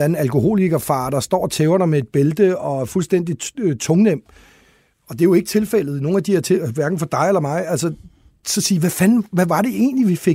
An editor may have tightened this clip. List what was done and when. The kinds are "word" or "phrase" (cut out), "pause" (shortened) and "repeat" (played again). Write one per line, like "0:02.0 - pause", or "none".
none